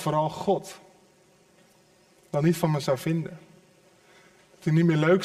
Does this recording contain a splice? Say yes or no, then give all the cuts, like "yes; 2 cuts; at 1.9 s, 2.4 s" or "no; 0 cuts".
no; 0 cuts